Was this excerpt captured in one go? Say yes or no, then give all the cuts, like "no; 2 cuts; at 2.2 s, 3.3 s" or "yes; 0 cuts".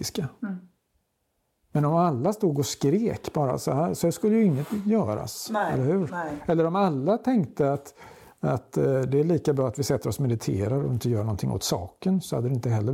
yes; 0 cuts